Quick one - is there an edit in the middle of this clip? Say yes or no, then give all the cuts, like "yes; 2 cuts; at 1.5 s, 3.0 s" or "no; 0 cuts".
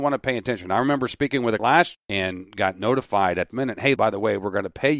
yes; 4 cuts; at 1.6 s, 1.9 s, 3.5 s, 4.0 s